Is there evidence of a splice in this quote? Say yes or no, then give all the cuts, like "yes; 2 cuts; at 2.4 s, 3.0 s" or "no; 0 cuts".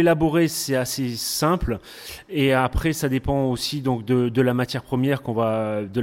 no; 0 cuts